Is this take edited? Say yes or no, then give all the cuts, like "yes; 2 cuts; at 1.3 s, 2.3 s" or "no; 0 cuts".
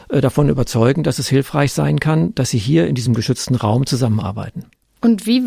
no; 0 cuts